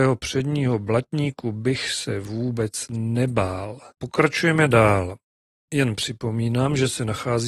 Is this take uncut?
no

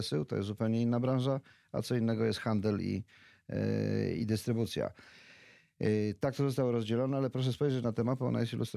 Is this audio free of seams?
yes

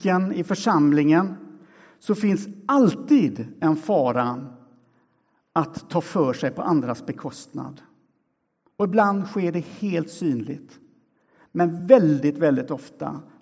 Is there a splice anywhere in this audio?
no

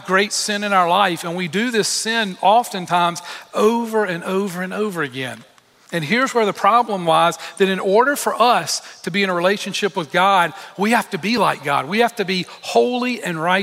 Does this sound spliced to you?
no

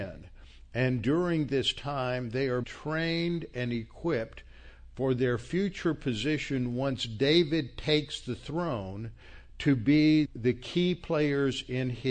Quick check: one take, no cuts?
no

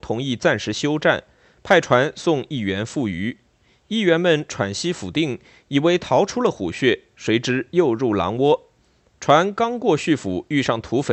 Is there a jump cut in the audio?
no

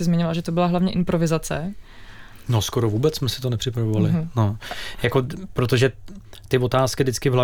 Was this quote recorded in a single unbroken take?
yes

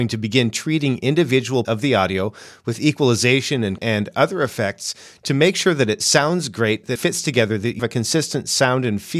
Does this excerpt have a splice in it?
yes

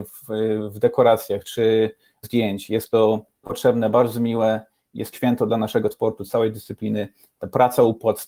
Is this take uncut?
no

